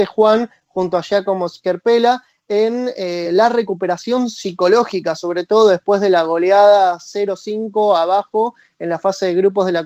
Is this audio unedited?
yes; 0 cuts

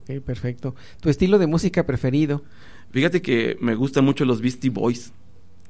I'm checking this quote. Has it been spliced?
no; 0 cuts

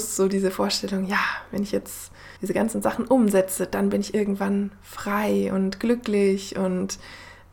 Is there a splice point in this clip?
yes; 1 cut; at 2.4 s

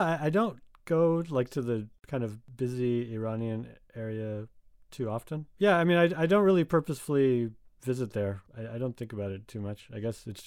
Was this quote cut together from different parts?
no; 0 cuts

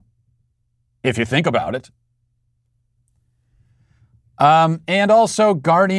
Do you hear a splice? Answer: no; 0 cuts

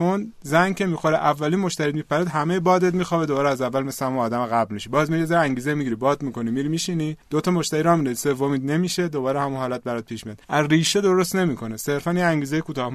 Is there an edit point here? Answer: yes; 2 cuts; at 7.2 s, 10.4 s

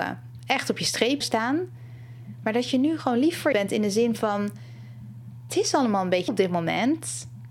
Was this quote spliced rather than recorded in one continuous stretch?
yes; 4 cuts; at 1.2 s, 3.5 s, 5.5 s, 6.3 s

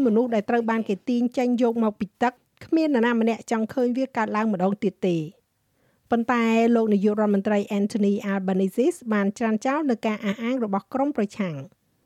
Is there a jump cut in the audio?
no; 0 cuts

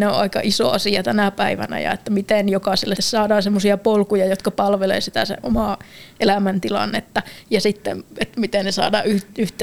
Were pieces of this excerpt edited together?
yes; 1 cut; at 3.0 s

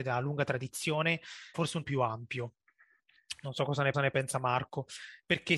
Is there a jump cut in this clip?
yes; 3 cuts; at 1.5 s, 1.8 s, 3.9 s

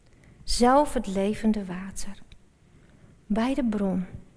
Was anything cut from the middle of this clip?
no; 0 cuts

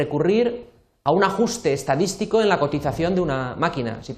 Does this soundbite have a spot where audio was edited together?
no; 0 cuts

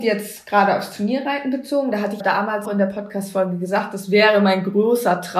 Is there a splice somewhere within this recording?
yes; 2 cuts; at 2.2 s, 2.6 s

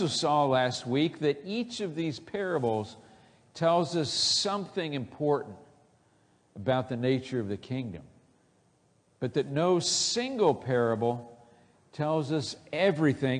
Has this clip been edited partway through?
no; 0 cuts

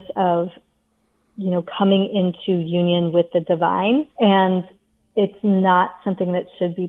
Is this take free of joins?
no; 1 cut; at 4.1 s

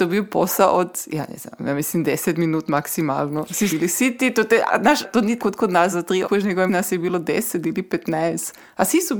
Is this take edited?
yes; 7 cuts; at 3.7 s, 4.7 s, 5.0 s, 5.4 s, 5.9 s, 6.2 s, 6.7 s

